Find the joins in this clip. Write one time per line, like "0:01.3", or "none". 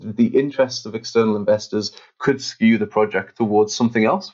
none